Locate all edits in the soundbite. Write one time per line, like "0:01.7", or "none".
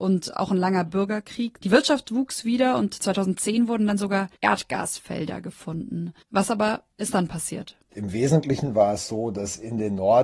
0:04.4
0:06.2
0:06.9
0:07.8

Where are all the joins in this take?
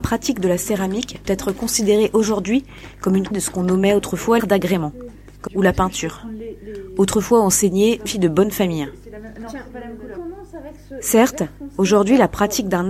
0:01.2
0:03.3
0:04.4
0:05.5
0:08.1

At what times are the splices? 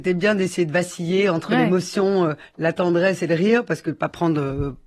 none

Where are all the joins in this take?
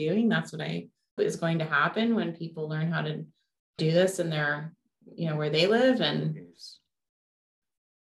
0:01.2
0:03.8

